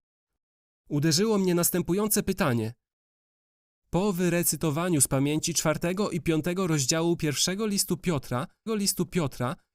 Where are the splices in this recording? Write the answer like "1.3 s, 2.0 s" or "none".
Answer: 8.7 s